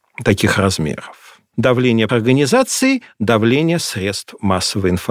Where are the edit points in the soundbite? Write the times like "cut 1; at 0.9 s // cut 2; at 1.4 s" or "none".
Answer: cut 1; at 2.1 s